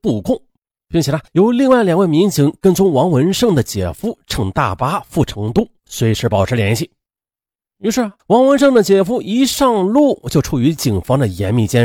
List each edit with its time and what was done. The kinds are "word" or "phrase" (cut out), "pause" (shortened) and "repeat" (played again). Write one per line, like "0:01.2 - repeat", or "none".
0:01.3 - pause
0:08.2 - pause